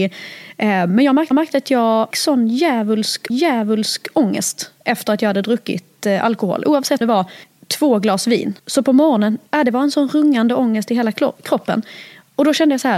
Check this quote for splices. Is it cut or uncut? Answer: cut